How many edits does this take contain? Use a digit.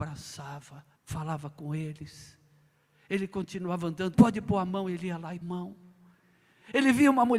3